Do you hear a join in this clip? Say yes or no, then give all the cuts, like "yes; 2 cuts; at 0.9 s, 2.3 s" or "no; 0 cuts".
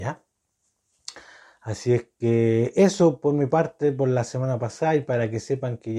no; 0 cuts